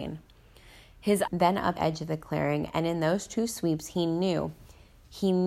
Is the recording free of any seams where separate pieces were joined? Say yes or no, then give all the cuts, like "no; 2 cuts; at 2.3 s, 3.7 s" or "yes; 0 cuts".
no; 2 cuts; at 1.3 s, 1.8 s